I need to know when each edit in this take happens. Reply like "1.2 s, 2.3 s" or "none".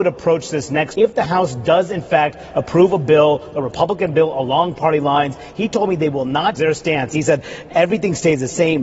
0.9 s, 6.6 s